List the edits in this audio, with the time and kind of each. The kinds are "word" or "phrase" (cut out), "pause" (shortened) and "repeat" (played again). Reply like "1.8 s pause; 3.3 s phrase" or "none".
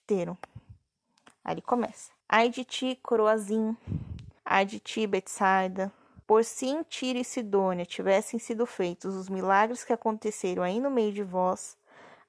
2.2 s pause; 4.4 s pause; 6.2 s pause

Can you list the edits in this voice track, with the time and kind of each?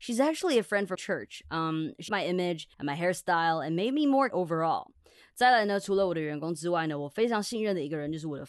0.9 s word; 2.1 s word; 2.7 s pause; 4.3 s word

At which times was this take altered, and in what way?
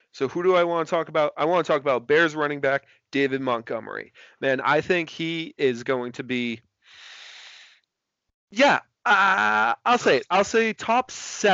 none

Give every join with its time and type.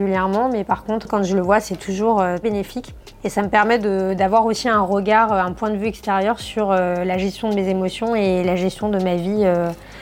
2.4 s word

